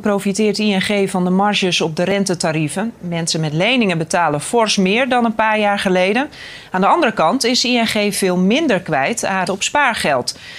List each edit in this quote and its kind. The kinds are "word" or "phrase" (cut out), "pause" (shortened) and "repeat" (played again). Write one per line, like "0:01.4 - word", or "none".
0:09.5 - word